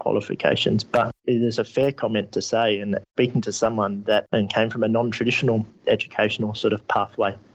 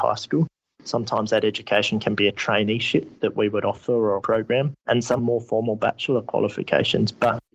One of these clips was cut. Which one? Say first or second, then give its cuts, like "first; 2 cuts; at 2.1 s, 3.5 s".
second; 3 cuts; at 3.2 s, 4.2 s, 5.2 s